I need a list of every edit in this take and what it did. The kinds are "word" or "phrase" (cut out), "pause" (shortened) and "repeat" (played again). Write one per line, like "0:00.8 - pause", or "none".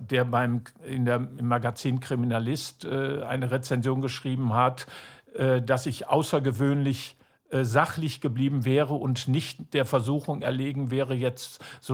none

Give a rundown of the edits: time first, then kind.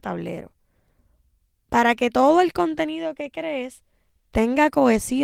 none

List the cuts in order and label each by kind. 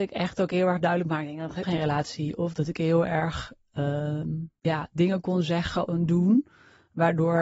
0:01.6 - word
0:04.6 - pause

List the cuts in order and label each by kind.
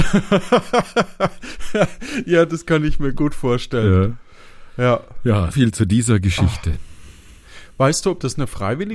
0:05.5 - word

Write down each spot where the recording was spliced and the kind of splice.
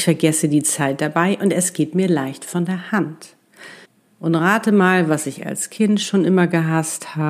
0:03.9 - pause

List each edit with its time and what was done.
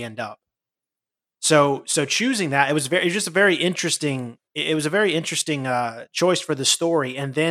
none

